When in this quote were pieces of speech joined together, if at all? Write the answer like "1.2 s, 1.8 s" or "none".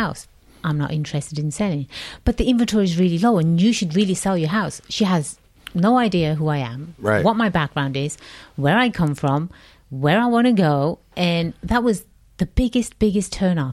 none